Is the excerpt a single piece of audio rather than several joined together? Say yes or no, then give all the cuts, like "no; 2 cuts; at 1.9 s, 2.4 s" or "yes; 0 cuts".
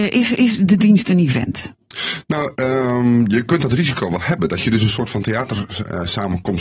yes; 0 cuts